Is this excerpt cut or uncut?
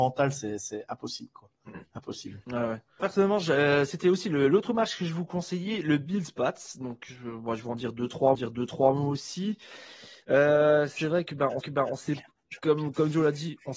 cut